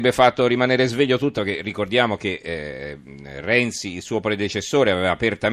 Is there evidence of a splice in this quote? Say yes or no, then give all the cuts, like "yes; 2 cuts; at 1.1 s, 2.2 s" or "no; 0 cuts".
yes; 1 cut; at 1.4 s